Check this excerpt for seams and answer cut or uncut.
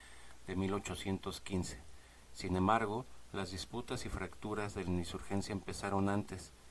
uncut